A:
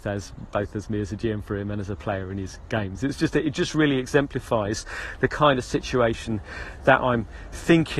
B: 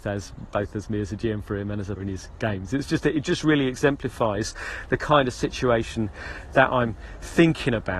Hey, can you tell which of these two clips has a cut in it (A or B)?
B